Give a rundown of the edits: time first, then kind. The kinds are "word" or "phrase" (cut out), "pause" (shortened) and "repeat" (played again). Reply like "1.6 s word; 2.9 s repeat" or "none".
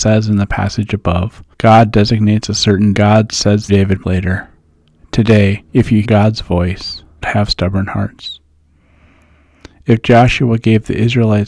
1.5 s pause; 2.9 s phrase; 3.7 s word; 4.0 s word; 5.7 s pause; 6.0 s word; 7.2 s word